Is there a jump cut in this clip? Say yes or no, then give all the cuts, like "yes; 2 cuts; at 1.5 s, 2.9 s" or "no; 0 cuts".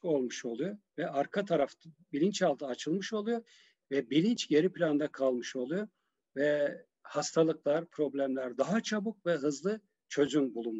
no; 0 cuts